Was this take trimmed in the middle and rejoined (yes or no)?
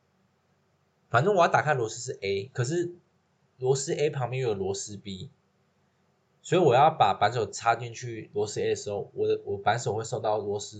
no